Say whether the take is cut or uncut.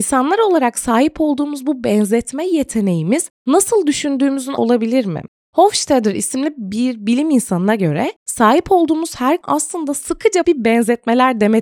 cut